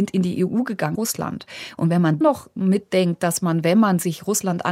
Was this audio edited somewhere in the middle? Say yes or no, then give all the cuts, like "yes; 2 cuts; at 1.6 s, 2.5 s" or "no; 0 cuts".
yes; 2 cuts; at 0.9 s, 2.2 s